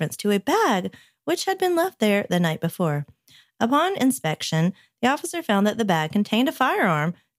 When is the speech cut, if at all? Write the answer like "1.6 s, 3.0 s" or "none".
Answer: none